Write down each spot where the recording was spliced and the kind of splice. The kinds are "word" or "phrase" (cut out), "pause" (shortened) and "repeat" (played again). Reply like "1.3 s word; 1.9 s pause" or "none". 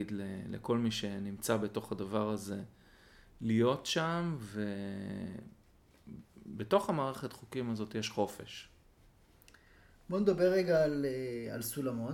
none